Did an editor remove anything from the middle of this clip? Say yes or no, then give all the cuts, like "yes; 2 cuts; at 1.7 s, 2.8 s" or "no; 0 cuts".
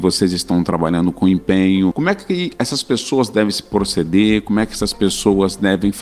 no; 0 cuts